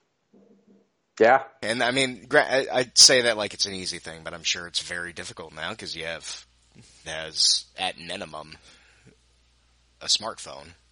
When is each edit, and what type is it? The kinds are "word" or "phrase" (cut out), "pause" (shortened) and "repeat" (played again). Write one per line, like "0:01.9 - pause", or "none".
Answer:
0:07.0 - phrase

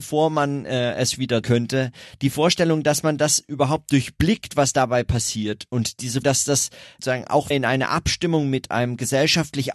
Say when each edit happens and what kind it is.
0:01.4 - word
0:06.2 - word
0:07.0 - word
0:07.5 - word

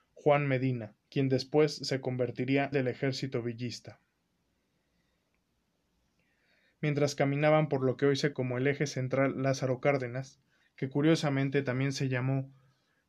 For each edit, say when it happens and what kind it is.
0:01.0 - pause
0:02.7 - phrase
0:08.3 - word
0:10.6 - pause

